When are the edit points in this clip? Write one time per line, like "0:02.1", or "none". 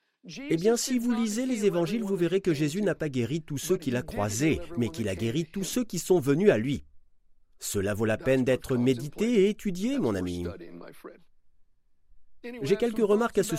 none